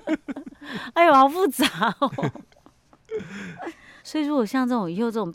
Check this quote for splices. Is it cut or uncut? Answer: cut